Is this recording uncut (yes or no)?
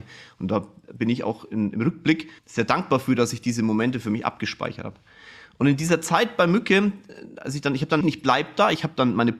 no